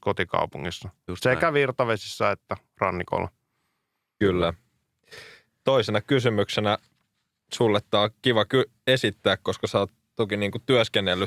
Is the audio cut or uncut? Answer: uncut